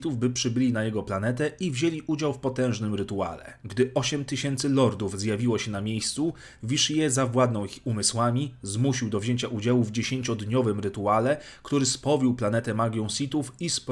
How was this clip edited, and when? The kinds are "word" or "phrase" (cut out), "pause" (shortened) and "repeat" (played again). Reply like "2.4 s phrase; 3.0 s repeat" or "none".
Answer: 3.6 s pause